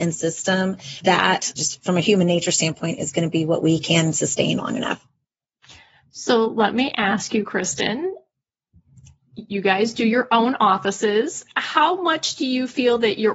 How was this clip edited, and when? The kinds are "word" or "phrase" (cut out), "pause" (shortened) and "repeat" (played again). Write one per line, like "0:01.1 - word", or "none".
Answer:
0:01.0 - word
0:01.6 - word